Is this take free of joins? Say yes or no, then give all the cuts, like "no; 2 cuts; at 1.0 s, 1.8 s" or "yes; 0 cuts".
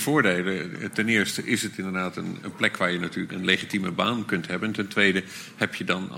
no; 2 cuts; at 2.4 s, 3.3 s